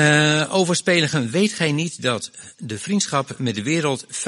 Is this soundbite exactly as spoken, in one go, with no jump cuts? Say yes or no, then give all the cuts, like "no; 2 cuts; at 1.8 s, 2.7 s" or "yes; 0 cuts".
yes; 0 cuts